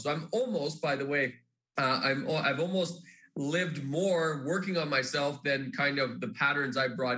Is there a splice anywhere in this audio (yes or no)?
no